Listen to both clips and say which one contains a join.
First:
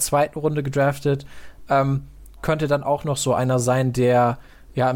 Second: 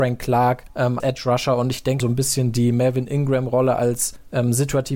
second; 2 cuts; at 1.0 s, 2.0 s

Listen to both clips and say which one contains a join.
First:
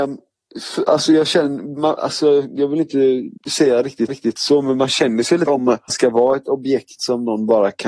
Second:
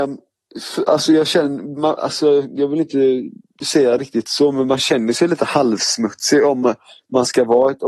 first; 4 cuts; at 3.4 s, 4.1 s, 5.5 s, 5.9 s

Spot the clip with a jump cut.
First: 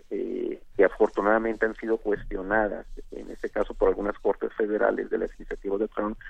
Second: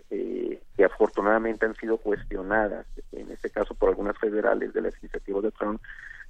second; 1 cut; at 4.2 s

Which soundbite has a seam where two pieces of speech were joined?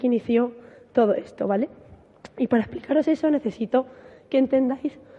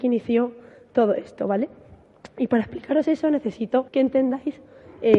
second; 1 cut; at 3.9 s

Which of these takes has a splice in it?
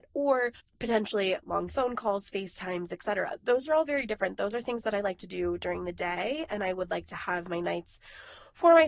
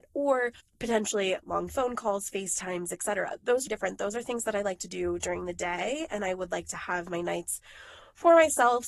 second; 1 cut; at 3.7 s

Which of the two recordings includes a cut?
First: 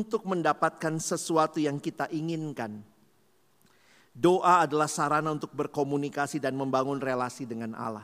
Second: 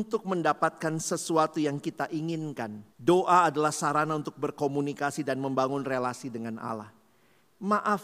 second; 1 cut; at 2.9 s

